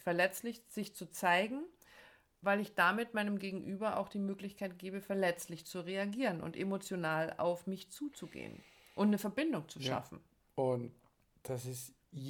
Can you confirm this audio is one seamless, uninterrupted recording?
yes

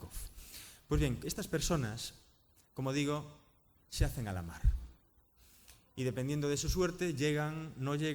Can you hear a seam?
no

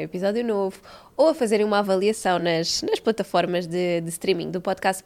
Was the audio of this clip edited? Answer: no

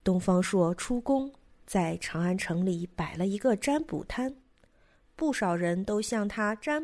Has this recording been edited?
no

